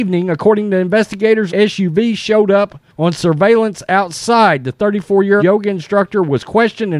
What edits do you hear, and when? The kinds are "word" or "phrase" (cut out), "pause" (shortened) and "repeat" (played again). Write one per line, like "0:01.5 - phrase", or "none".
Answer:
0:01.5 - word
0:02.9 - pause
0:05.4 - word